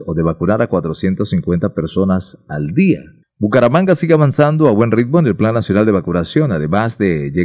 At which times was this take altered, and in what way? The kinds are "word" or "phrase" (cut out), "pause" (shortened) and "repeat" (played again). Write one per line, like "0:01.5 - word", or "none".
0:03.2 - pause